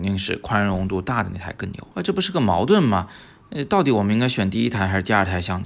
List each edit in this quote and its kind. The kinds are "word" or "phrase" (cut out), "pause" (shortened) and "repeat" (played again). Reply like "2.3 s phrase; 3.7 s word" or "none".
1.9 s pause